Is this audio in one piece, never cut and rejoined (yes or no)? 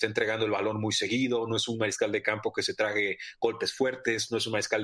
yes